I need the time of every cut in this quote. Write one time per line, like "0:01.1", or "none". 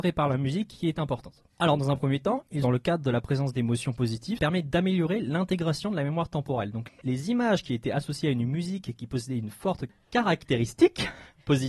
0:01.5
0:02.6
0:04.4